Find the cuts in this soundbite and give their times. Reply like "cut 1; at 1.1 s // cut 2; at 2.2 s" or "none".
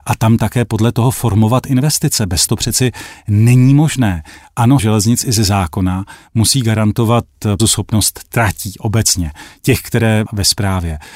cut 1; at 2.5 s // cut 2; at 4.8 s // cut 3; at 7.6 s // cut 4; at 10.3 s